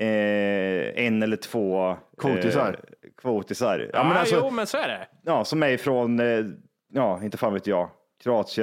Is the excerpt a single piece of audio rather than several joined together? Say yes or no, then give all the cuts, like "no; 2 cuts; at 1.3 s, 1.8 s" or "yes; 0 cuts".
yes; 0 cuts